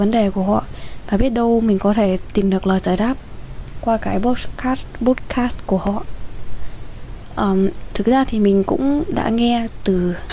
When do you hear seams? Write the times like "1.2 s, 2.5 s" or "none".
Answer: none